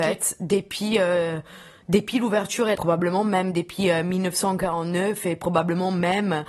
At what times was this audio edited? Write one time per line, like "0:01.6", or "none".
0:02.7